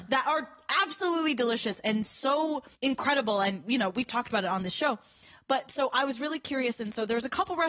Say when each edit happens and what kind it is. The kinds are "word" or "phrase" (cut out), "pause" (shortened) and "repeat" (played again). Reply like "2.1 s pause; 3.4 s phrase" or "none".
2.8 s pause